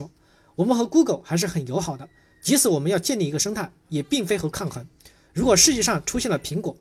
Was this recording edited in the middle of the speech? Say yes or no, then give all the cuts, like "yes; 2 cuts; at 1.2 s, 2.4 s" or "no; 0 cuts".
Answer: yes; 1 cut; at 4.5 s